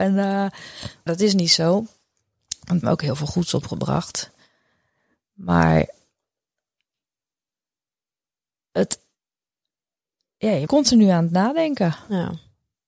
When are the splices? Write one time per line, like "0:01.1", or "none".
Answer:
0:01.1
0:02.8
0:10.7